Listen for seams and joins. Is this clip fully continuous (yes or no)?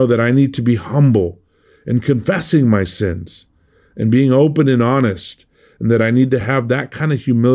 yes